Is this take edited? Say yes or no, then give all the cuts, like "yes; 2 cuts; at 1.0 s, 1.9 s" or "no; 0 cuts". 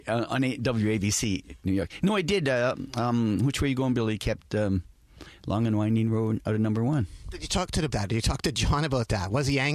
yes; 1 cut; at 7.9 s